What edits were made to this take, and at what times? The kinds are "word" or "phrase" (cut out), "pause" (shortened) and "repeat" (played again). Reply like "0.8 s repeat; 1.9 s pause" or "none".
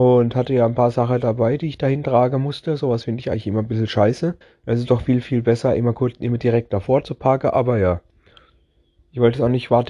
4.4 s pause